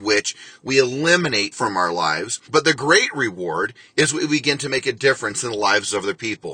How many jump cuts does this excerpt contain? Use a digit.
2